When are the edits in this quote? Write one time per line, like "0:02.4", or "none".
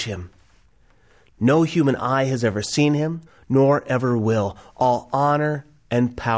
0:03.3

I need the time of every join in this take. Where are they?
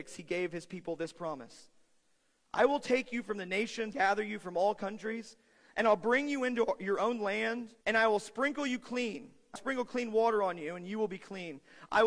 0:03.9
0:07.8
0:09.6

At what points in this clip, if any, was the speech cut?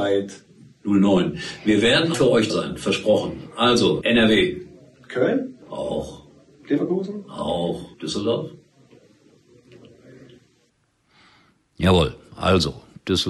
0:02.1
0:02.5
0:04.0
0:05.6
0:07.9

